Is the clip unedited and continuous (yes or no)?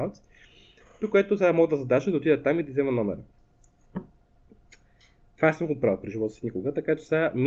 yes